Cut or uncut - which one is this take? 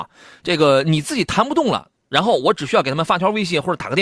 cut